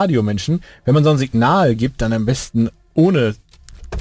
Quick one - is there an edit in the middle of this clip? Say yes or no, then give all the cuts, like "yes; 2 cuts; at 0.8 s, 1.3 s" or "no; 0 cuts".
no; 0 cuts